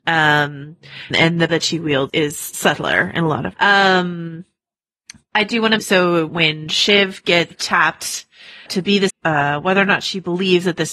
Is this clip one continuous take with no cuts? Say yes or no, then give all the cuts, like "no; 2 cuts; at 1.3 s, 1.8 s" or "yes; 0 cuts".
no; 9 cuts; at 1.1 s, 1.5 s, 2.1 s, 3.5 s, 5.8 s, 6.3 s, 7.5 s, 8.7 s, 9.1 s